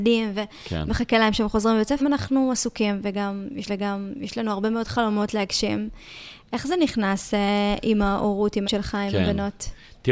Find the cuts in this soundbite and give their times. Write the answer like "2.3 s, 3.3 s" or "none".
2.0 s, 3.7 s, 8.6 s